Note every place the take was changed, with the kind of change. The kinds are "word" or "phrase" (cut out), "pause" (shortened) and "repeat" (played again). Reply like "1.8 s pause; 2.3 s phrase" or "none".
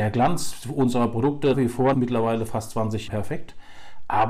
1.5 s word; 1.9 s word; 3.1 s word